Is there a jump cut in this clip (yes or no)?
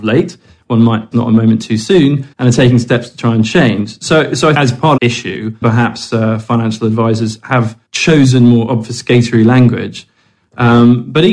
yes